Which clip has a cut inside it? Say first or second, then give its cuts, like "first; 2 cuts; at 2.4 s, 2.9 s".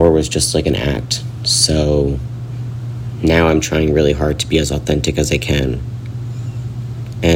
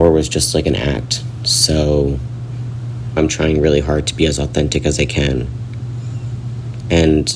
second; 1 cut; at 3.2 s